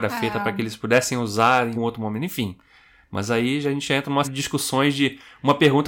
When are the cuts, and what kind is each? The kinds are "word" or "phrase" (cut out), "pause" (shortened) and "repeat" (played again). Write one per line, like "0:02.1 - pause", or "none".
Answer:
0:01.7 - word
0:04.2 - word